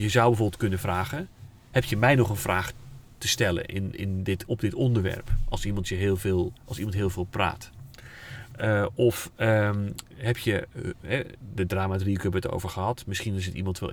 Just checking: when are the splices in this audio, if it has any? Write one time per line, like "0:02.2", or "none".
0:06.6